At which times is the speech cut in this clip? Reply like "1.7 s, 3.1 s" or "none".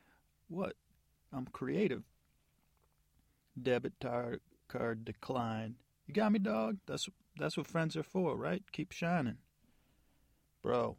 6.8 s